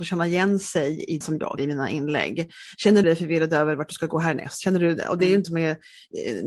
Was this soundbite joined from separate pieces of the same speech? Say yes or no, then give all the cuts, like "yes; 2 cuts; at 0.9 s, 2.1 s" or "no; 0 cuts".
yes; 4 cuts; at 1.2 s, 1.6 s, 3.0 s, 5.4 s